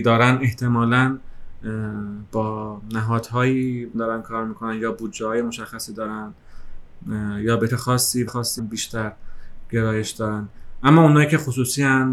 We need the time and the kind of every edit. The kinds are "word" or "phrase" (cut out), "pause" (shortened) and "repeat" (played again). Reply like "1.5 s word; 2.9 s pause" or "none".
3.9 s word; 7.7 s word; 8.3 s word; 8.6 s word